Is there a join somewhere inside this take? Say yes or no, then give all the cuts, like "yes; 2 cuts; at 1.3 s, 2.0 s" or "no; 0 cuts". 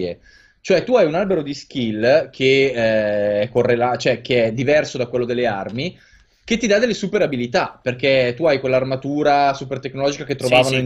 no; 0 cuts